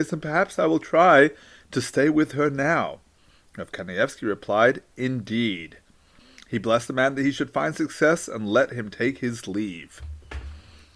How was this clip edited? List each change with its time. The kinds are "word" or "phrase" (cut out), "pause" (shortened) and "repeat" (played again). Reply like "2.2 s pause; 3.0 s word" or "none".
none